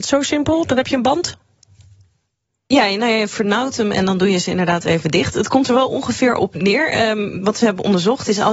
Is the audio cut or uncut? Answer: uncut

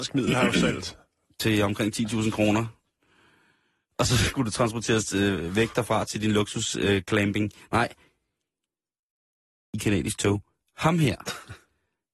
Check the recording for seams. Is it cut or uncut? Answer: uncut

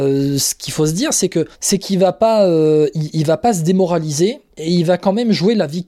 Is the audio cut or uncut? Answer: cut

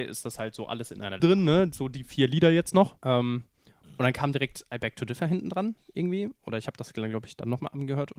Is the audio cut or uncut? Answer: cut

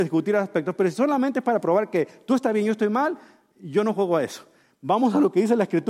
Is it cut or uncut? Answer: uncut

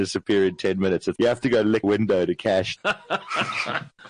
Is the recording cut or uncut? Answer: cut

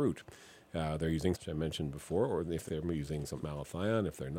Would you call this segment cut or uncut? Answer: cut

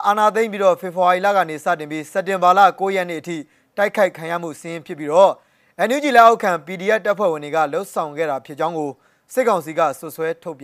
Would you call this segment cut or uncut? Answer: uncut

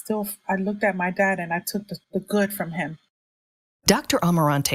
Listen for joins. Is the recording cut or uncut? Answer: uncut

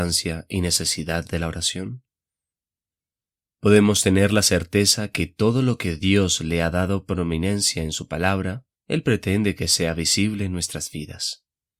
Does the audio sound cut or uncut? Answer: cut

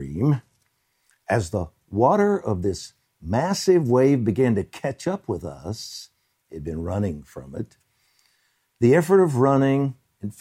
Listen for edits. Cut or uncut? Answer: uncut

